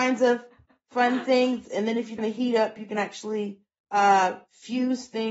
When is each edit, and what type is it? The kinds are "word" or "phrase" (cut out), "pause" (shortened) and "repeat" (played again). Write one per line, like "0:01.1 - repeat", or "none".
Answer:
0:02.2 - word
0:03.8 - pause